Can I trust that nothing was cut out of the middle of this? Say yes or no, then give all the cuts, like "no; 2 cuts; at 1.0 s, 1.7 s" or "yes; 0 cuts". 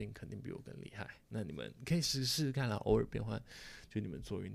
no; 1 cut; at 1.2 s